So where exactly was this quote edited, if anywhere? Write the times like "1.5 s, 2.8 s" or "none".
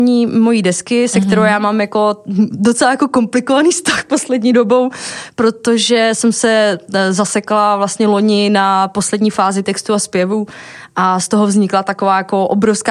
9.6 s